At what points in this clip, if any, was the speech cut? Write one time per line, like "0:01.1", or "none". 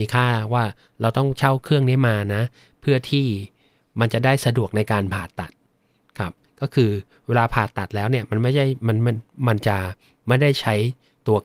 none